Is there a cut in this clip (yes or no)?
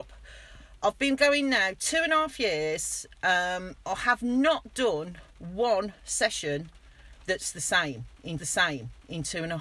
yes